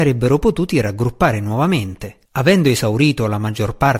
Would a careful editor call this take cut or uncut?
cut